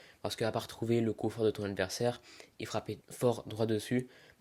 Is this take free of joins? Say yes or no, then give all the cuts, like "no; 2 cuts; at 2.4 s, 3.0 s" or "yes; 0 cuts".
no; 1 cut; at 3.0 s